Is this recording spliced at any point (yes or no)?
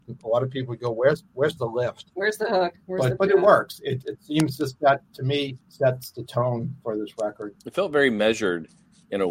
yes